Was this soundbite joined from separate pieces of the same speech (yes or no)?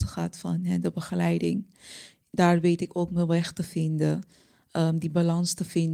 no